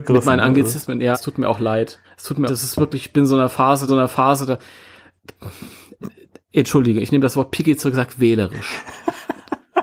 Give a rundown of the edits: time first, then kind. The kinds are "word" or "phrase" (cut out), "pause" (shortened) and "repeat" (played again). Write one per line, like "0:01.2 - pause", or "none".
0:01.1 - word
0:02.0 - pause
0:02.5 - phrase
0:03.9 - repeat